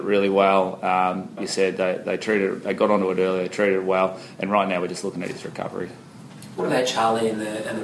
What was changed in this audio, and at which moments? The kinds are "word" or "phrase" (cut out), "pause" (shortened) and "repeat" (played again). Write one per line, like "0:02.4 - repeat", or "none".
0:01.4 - word